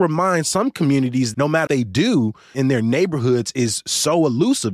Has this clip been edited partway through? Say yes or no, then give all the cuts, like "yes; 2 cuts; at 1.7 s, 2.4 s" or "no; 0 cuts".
yes; 3 cuts; at 1.3 s, 1.7 s, 2.5 s